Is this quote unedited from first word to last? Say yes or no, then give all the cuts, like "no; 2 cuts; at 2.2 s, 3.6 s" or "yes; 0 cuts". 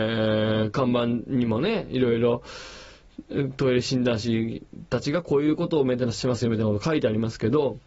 yes; 0 cuts